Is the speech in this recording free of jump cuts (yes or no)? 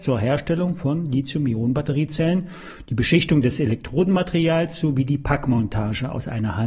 yes